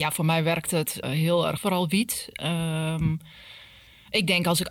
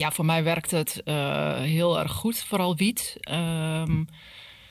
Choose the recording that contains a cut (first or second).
first